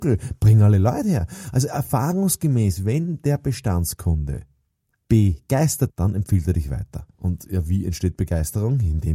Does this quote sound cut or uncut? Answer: cut